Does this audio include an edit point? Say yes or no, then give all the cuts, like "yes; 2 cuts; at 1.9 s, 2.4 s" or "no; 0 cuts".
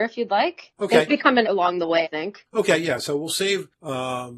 yes; 3 cuts; at 1.1 s, 1.4 s, 2.0 s